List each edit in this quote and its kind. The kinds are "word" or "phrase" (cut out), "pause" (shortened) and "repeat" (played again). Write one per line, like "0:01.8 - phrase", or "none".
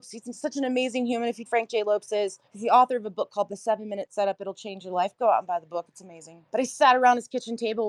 0:01.5 - phrase
0:02.5 - pause
0:06.5 - pause

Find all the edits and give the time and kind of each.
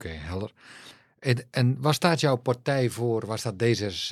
none

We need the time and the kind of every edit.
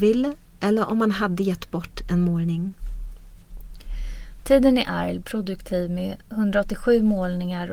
0:05.2 - phrase

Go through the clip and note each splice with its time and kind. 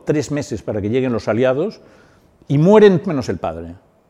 0:03.0 - word

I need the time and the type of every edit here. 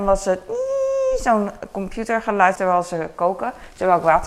0:02.6 - word

